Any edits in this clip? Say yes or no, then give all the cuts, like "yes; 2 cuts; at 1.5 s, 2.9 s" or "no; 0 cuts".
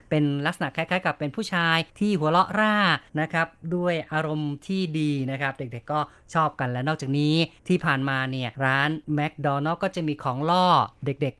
yes; 5 cuts; at 1.9 s, 3.1 s, 7.6 s, 8.5 s, 9.0 s